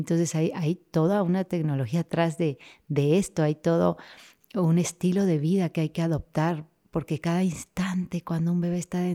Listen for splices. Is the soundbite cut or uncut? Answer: uncut